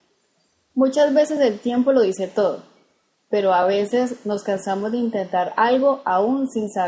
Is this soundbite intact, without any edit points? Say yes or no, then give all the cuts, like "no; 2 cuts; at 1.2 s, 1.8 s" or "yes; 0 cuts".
yes; 0 cuts